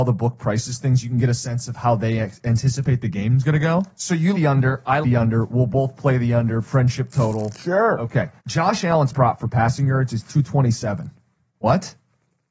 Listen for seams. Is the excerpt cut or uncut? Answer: cut